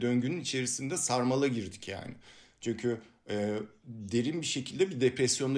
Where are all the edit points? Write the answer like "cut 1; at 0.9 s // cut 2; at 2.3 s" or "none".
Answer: none